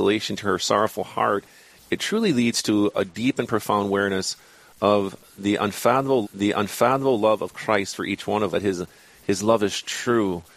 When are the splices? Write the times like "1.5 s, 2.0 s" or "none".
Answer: 6.2 s, 8.5 s